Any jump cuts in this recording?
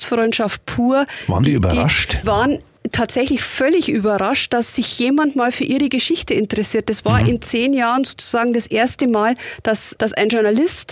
yes; 2 cuts; at 2.2 s, 10.0 s

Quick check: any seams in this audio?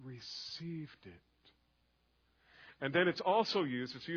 no; 0 cuts

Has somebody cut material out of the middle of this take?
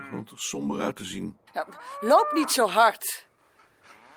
yes; 1 cut; at 1.5 s

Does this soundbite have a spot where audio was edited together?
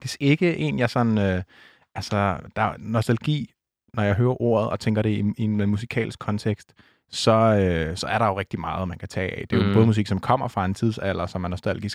no; 0 cuts

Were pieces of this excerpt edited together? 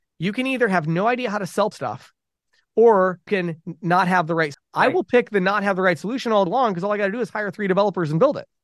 yes; 4 cuts; at 1.7 s, 3.3 s, 4.5 s, 6.5 s

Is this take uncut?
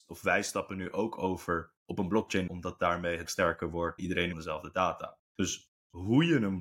no; 6 cuts; at 1.8 s, 2.5 s, 3.3 s, 4.0 s, 4.3 s, 5.2 s

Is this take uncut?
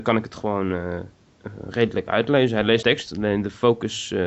no; 1 cut; at 2.8 s

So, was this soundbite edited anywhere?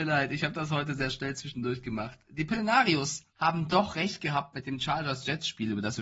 yes; 1 cut; at 3.3 s

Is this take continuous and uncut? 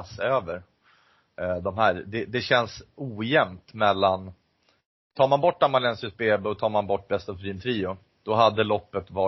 yes; 0 cuts

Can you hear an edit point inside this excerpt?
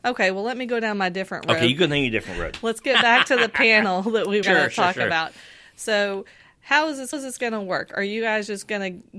yes; 2 cuts; at 4.4 s, 7.1 s

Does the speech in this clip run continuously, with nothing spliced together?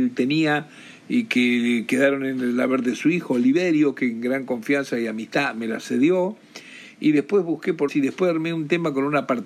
no; 1 cut; at 7.9 s

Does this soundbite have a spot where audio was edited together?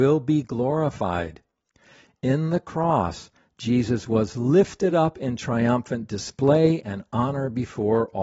no; 0 cuts

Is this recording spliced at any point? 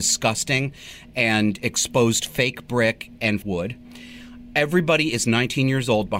yes; 1 cut; at 3.4 s

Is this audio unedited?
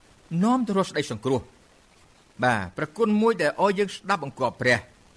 yes; 0 cuts

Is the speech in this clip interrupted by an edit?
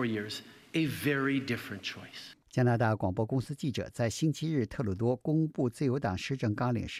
yes; 1 cut; at 2.4 s

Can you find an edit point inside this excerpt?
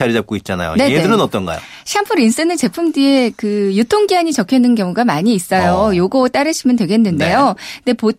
no; 0 cuts

